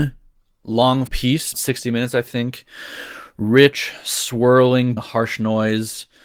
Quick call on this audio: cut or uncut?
cut